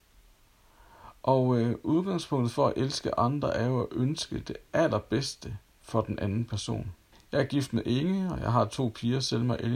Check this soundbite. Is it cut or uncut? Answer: cut